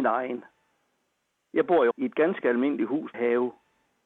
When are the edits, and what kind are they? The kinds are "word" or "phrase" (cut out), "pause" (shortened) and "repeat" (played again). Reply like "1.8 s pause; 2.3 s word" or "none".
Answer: 1.9 s word; 3.1 s word